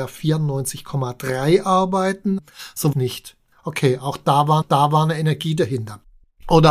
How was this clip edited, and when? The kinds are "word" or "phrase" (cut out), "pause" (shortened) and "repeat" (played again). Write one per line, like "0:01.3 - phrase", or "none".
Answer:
0:02.9 - phrase
0:04.6 - repeat